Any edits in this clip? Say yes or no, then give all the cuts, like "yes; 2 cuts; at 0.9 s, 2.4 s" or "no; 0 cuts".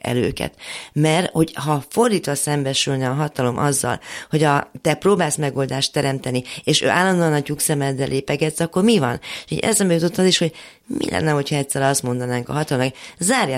no; 0 cuts